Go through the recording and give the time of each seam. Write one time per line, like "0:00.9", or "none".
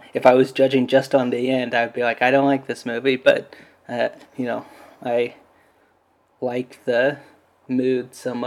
none